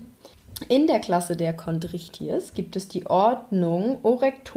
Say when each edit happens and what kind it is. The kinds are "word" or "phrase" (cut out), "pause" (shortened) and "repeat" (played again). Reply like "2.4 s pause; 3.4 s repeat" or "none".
none